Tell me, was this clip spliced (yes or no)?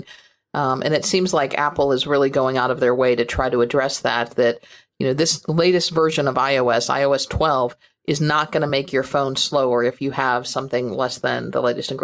no